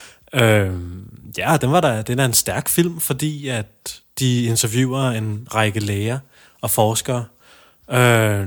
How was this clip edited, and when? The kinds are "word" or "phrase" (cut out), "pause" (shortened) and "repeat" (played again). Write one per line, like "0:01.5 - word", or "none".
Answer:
none

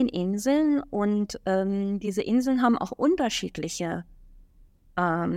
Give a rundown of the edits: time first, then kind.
none

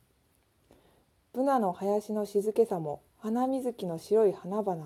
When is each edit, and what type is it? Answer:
0:03.1 - pause

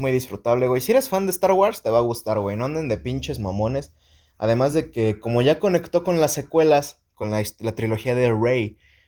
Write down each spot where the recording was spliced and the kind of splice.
none

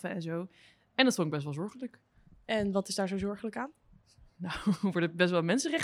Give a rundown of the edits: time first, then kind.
none

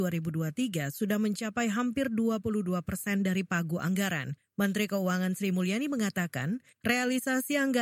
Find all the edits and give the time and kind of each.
none

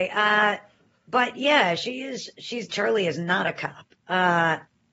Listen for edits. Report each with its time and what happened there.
0:02.7 - word

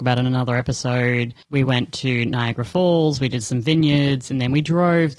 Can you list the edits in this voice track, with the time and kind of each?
0:01.4 - pause

